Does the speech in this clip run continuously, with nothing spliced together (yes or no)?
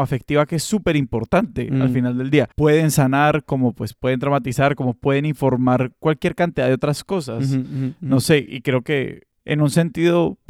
no